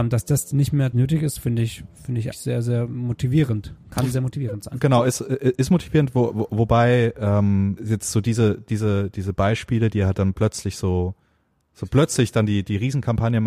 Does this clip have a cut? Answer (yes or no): yes